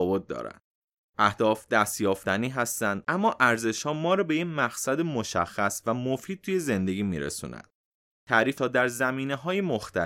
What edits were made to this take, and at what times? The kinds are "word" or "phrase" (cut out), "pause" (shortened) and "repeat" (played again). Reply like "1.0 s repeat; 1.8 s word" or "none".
8.6 s word